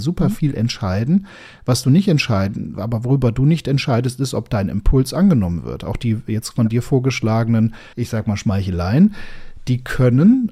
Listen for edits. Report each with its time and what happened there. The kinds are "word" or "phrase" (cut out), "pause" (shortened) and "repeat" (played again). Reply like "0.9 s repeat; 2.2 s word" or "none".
2.7 s word; 7.9 s pause